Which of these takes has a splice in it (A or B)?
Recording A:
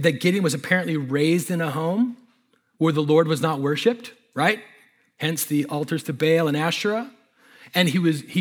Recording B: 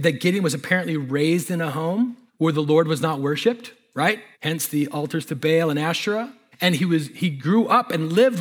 B